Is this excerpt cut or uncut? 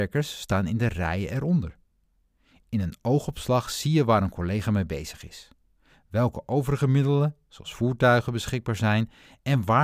uncut